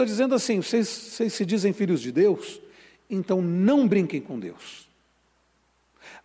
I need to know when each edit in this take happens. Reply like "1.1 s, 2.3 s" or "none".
none